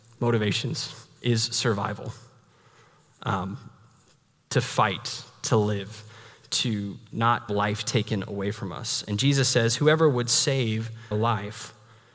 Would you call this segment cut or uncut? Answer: cut